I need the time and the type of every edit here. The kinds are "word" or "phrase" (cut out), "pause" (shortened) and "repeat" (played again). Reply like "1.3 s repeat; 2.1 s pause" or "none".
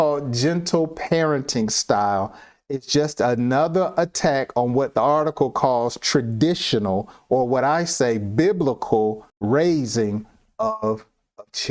9.3 s pause